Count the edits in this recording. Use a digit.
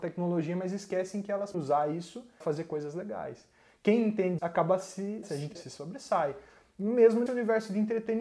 6